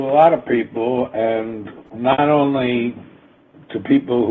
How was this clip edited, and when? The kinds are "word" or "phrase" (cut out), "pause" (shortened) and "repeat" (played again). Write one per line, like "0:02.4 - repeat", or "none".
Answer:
0:01.9 - pause

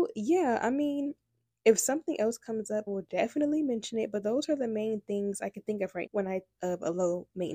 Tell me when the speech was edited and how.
0:02.9 - word
0:06.1 - word
0:06.6 - word

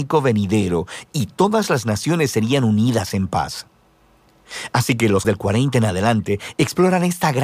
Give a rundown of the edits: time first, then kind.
0:05.2 - word

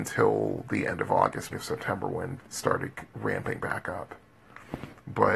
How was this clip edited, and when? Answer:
0:01.5 - word
0:02.4 - word
0:03.1 - word

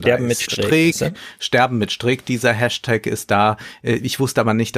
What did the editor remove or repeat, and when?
none

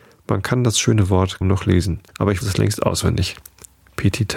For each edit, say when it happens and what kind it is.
0:01.4 - word
0:02.1 - pause
0:02.4 - word

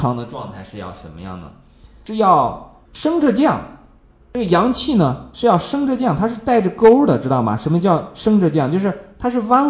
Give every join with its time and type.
0:02.8 - pause

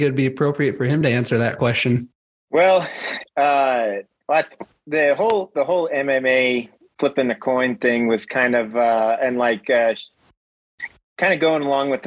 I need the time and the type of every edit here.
none

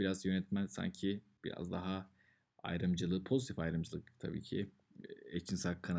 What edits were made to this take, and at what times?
none

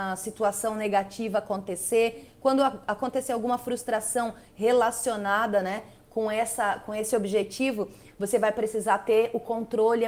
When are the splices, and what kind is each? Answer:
none

